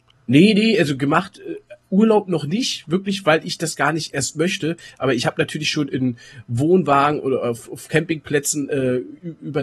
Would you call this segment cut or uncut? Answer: uncut